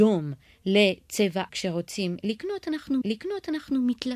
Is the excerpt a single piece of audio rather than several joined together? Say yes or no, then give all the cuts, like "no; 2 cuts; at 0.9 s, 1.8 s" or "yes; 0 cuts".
no; 2 cuts; at 1.5 s, 3.0 s